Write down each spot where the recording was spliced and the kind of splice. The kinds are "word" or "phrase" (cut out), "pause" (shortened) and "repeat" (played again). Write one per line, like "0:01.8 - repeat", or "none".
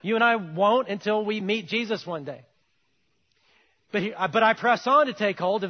none